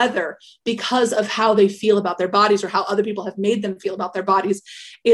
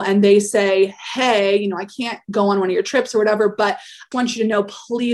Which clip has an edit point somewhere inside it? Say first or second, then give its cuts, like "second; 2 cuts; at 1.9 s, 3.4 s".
second; 1 cut; at 4.1 s